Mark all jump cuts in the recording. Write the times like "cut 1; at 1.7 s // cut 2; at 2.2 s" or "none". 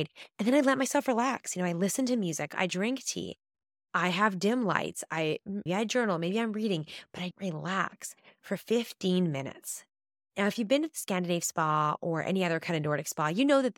cut 1; at 5.7 s // cut 2; at 7.3 s